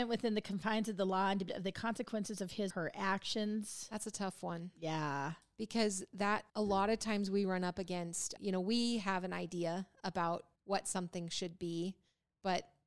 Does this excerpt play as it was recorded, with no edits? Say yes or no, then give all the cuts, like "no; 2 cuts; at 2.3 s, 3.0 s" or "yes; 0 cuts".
no; 5 cuts; at 1.5 s, 2.7 s, 6.5 s, 8.4 s, 10.6 s